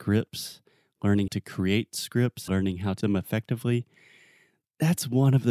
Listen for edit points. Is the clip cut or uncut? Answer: cut